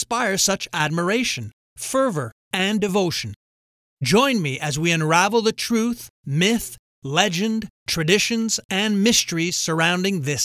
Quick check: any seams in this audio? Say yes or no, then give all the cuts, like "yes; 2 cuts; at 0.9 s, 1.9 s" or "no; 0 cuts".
no; 0 cuts